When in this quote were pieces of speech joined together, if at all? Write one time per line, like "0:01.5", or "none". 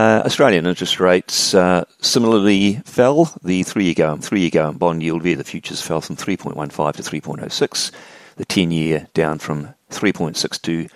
0:04.2